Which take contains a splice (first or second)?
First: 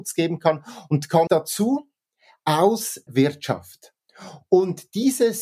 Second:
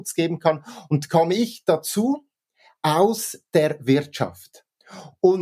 first